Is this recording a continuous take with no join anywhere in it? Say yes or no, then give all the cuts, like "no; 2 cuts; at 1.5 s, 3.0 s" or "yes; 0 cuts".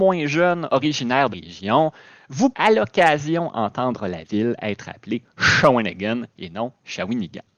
no; 2 cuts; at 1.3 s, 2.5 s